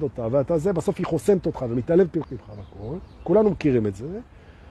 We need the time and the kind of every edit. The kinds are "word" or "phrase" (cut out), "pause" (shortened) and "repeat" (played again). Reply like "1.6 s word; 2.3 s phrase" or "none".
2.2 s word